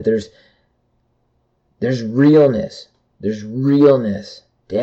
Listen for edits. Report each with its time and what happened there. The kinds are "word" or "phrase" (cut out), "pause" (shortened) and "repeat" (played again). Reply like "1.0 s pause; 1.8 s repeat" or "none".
none